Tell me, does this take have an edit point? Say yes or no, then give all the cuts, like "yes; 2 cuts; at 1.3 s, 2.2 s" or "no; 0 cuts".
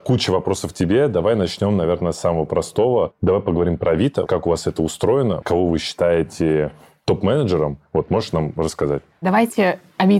no; 0 cuts